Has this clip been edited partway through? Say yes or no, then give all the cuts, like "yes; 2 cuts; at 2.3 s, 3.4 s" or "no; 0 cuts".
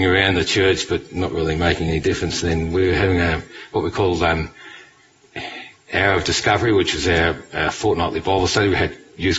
no; 0 cuts